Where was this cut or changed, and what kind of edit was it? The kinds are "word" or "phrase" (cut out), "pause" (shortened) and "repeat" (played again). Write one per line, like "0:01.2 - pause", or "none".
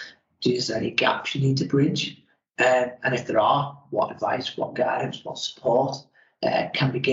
none